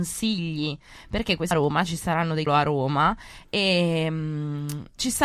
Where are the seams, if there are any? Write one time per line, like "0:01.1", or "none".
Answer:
0:01.5
0:02.5